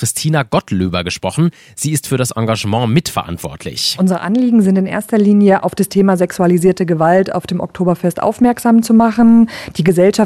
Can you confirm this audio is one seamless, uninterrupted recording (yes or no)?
yes